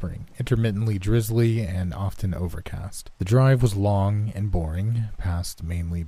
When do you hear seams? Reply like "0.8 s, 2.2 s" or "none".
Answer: 3.1 s